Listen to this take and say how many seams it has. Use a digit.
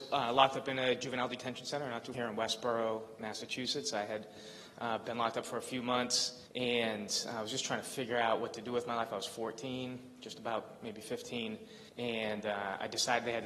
3